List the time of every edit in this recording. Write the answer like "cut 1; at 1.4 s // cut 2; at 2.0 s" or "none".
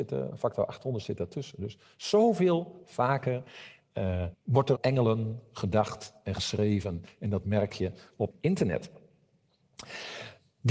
cut 1; at 4.3 s // cut 2; at 4.8 s // cut 3; at 8.3 s

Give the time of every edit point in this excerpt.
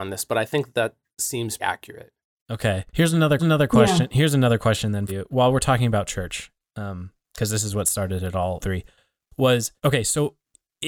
cut 1; at 1.6 s // cut 2; at 2.9 s // cut 3; at 3.4 s // cut 4; at 5.1 s // cut 5; at 8.6 s // cut 6; at 9.8 s

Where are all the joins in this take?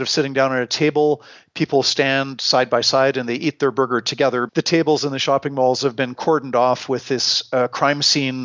cut 1; at 4.5 s

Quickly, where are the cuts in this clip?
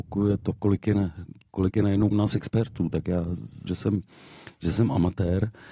cut 1; at 2.1 s // cut 2; at 3.7 s

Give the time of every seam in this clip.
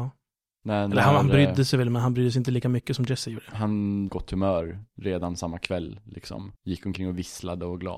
cut 1; at 4.1 s // cut 2; at 6.6 s

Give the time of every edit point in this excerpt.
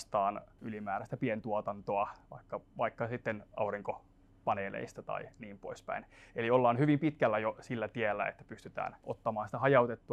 none

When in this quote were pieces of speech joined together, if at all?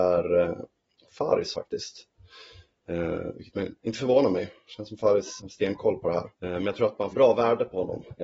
cut 1; at 1.5 s // cut 2; at 5.4 s // cut 3; at 6.3 s // cut 4; at 7.1 s

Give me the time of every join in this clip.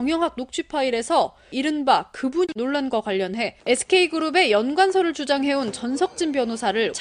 cut 1; at 3.6 s

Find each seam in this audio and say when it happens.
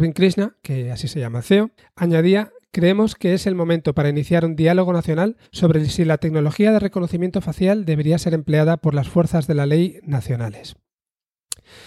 cut 1; at 1.8 s // cut 2; at 5.5 s

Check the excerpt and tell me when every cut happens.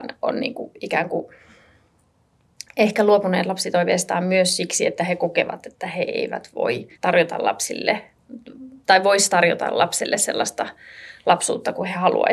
cut 1; at 6.9 s

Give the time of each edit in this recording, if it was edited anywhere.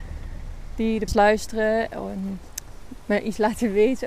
cut 1; at 1.1 s

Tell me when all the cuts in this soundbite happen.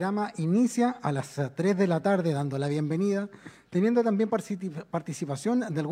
none

